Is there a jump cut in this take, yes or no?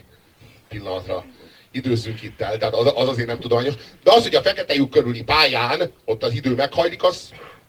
no